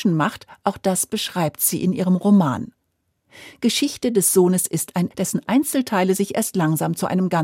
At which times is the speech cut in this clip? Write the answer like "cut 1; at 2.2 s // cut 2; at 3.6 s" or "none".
cut 1; at 5.1 s